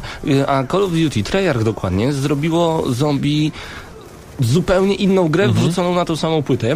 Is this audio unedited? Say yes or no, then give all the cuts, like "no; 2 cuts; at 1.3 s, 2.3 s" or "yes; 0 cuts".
yes; 0 cuts